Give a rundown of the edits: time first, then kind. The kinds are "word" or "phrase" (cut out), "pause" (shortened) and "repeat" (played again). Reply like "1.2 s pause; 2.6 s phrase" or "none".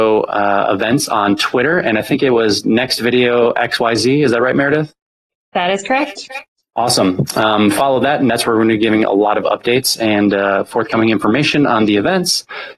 none